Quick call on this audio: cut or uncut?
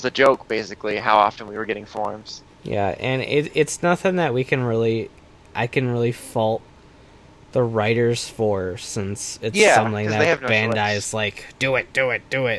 uncut